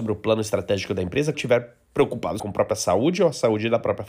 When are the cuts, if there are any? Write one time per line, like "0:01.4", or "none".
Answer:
0:01.3
0:02.4